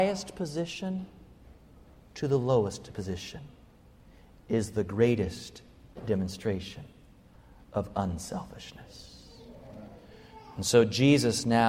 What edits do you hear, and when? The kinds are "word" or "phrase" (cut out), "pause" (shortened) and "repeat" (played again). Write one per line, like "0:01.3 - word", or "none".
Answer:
none